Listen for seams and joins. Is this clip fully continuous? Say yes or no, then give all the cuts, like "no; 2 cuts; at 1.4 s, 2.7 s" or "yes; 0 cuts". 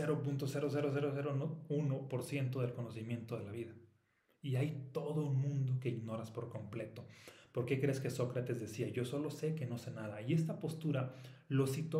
yes; 0 cuts